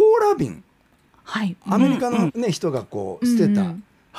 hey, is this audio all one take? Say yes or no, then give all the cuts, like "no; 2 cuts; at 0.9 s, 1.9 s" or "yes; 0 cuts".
no; 1 cut; at 2.3 s